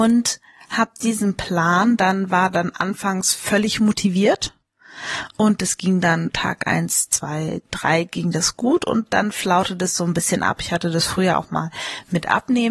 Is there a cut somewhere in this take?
no; 0 cuts

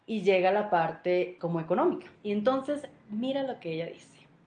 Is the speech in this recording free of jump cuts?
no; 2 cuts; at 1.4 s, 2.1 s

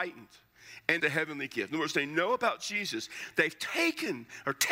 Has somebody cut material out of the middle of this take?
yes; 1 cut; at 1.0 s

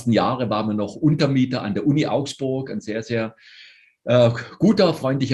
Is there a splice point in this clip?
no; 0 cuts

